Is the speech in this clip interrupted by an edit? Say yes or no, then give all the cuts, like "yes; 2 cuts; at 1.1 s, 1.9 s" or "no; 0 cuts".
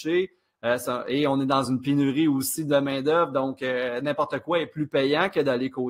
no; 0 cuts